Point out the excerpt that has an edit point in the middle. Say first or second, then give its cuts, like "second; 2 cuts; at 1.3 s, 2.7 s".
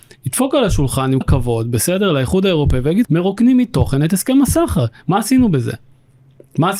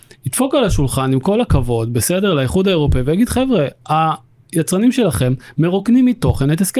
first; 2 cuts; at 1.2 s, 3.0 s